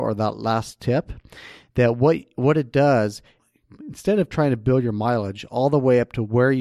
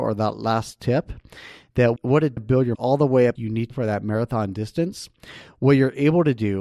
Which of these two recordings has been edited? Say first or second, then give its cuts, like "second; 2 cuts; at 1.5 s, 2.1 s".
second; 5 cuts; at 2.0 s, 2.4 s, 2.7 s, 3.4 s, 3.7 s